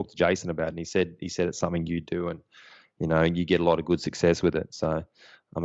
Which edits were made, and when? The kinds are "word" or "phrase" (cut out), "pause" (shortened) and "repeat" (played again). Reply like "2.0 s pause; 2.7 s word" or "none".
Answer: none